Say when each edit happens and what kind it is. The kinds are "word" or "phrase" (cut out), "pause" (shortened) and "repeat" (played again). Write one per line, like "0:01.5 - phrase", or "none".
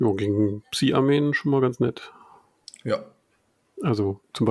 none